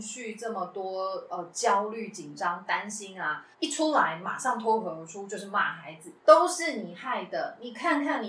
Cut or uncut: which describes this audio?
cut